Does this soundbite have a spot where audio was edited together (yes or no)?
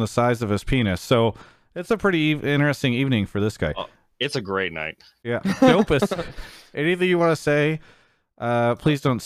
no